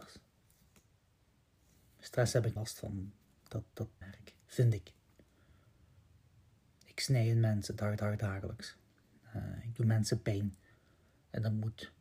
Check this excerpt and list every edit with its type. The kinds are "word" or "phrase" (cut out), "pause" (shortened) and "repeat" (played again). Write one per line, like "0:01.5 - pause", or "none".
0:02.6 - word
0:04.0 - phrase
0:08.0 - repeat

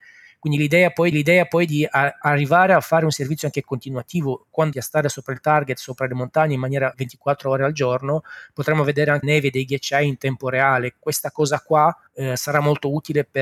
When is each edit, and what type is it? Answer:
0:01.1 - repeat
0:04.7 - phrase
0:06.9 - word
0:09.2 - phrase
0:12.1 - pause

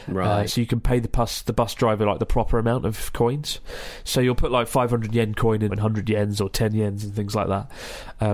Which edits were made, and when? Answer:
0:05.7 - phrase

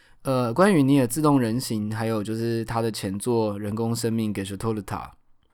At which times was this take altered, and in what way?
none

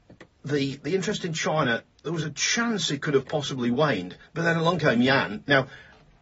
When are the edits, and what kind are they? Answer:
0:04.3 - pause

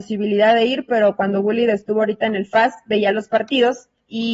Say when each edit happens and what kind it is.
none

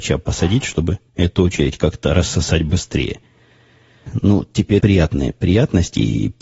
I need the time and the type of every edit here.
0:01.1 - pause
0:04.8 - phrase

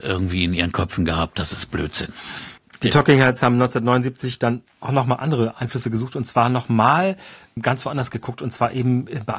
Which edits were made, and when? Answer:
none

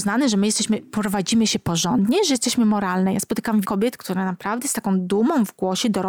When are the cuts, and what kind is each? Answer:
0:03.6 - word

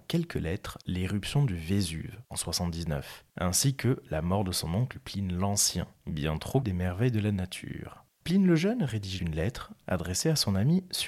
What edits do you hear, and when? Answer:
0:06.6 - word
0:08.1 - pause
0:09.2 - word

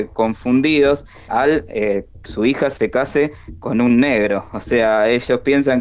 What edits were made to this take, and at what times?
0:01.3 - word
0:02.2 - word

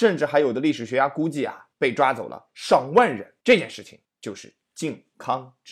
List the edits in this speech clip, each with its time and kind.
0:01.7 - pause
0:03.4 - pause
0:04.0 - pause

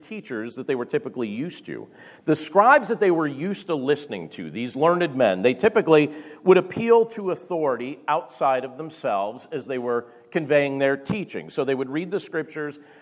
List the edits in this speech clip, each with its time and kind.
none

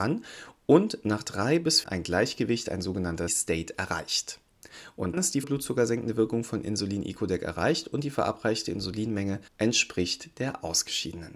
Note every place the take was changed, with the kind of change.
0:01.8 - phrase
0:03.3 - word
0:05.1 - word
0:05.4 - word
0:09.5 - pause

